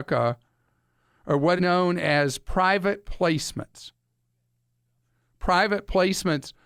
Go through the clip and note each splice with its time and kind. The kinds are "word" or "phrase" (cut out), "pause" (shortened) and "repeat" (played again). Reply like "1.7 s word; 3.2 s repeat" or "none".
1.6 s word